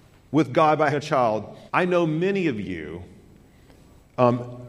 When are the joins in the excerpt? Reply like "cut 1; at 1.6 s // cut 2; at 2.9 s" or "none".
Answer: cut 1; at 0.9 s // cut 2; at 1.7 s